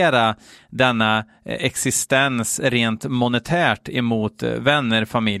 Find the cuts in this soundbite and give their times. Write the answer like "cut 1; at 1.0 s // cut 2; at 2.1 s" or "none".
none